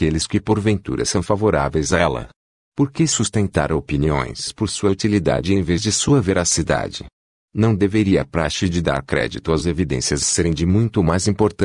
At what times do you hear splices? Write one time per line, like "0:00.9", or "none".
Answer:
0:10.2